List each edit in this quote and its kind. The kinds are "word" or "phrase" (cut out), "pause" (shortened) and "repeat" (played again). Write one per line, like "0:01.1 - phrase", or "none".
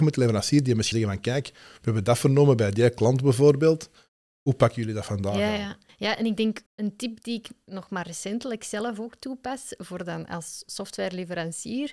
0:00.9 - phrase
0:05.9 - pause
0:06.7 - pause